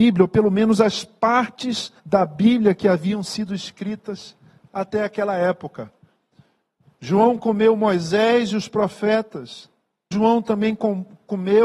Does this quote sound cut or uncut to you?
cut